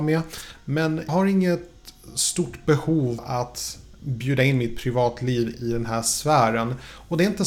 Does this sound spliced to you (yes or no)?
yes